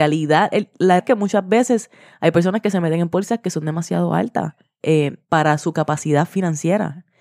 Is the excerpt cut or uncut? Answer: cut